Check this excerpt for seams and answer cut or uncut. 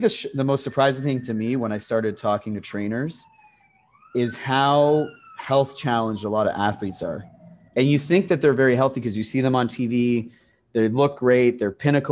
uncut